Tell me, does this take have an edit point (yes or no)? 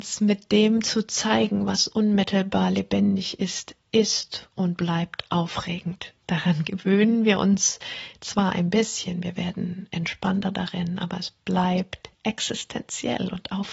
yes